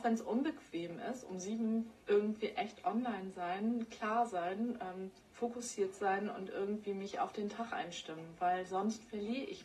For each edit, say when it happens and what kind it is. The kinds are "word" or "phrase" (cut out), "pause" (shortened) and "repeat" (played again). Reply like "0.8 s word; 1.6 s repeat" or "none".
2.0 s pause; 5.2 s pause